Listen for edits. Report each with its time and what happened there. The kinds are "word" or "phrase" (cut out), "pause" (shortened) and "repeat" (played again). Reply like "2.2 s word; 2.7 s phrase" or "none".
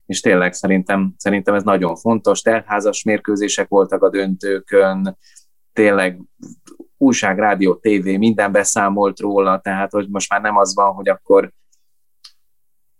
none